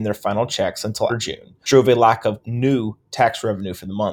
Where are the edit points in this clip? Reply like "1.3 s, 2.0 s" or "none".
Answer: 1.1 s, 1.7 s, 2.4 s